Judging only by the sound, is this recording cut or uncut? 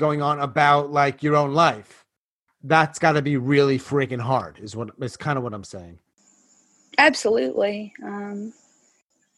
uncut